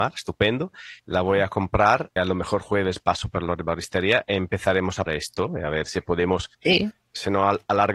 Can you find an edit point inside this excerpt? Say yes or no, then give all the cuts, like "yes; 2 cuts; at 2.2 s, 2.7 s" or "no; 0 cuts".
yes; 4 cuts; at 1.0 s, 2.2 s, 5.1 s, 6.5 s